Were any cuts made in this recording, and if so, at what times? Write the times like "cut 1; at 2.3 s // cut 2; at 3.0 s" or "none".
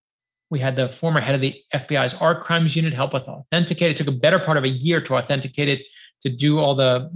none